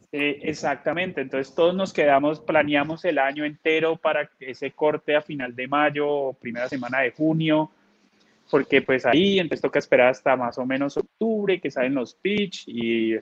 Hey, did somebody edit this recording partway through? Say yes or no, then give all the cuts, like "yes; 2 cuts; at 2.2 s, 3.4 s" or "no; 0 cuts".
no; 0 cuts